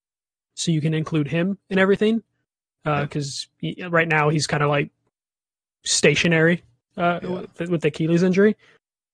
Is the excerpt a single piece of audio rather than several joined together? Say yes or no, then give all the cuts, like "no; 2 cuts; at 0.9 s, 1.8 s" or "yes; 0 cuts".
yes; 0 cuts